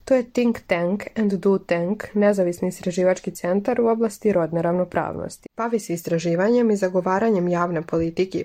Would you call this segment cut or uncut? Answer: uncut